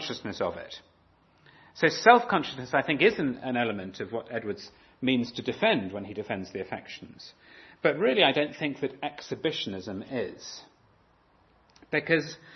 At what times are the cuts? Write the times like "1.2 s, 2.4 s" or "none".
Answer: none